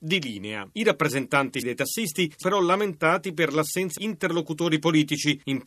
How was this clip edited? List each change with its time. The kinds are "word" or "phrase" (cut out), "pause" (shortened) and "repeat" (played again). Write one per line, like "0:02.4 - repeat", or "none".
0:01.6 - word
0:02.4 - word
0:04.0 - word